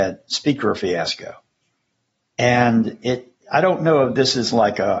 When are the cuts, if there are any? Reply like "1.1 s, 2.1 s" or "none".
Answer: 3.4 s

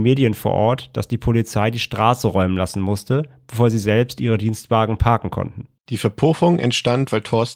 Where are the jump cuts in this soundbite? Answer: 5.8 s

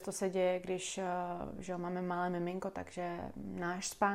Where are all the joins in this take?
none

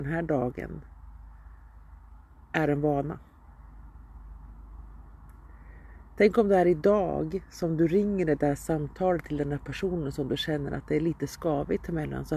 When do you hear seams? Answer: none

